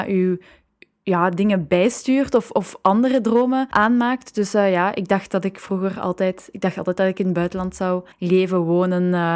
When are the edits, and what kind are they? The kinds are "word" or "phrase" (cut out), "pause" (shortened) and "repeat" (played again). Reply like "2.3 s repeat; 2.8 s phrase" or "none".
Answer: 8.1 s pause